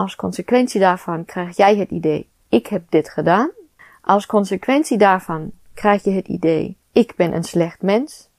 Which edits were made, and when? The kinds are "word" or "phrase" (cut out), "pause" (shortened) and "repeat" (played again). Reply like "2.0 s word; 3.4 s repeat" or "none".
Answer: 3.8 s pause; 6.8 s pause